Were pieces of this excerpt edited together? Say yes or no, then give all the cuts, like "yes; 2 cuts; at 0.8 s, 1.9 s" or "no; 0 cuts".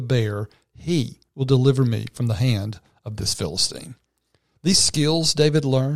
no; 0 cuts